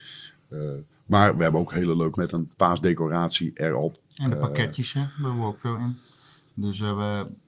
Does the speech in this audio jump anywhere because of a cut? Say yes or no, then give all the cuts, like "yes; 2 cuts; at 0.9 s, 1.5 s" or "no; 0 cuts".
yes; 2 cuts; at 2.1 s, 4.0 s